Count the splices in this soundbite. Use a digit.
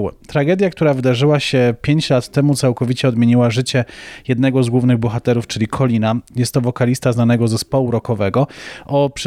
0